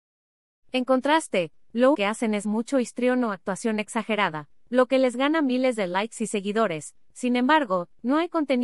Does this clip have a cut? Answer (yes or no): yes